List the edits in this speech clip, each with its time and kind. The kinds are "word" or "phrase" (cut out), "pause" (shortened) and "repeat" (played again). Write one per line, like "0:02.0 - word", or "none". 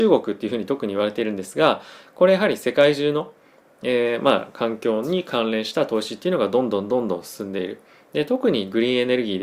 none